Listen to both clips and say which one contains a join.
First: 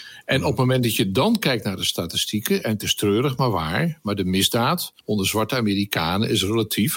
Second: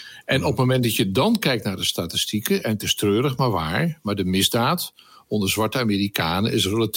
first; 1 cut; at 5.0 s

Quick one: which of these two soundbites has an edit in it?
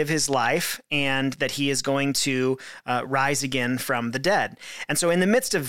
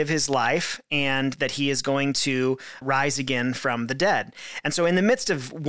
second; 1 cut; at 2.8 s

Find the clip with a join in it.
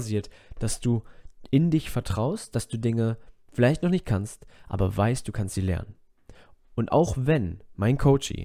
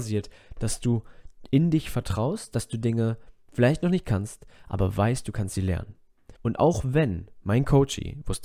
second; 1 cut; at 6.4 s

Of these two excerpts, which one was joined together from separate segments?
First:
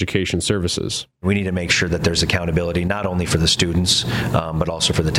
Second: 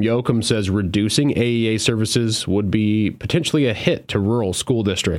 first; 1 cut; at 1.1 s

